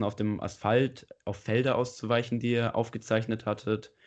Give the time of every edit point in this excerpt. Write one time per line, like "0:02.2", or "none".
none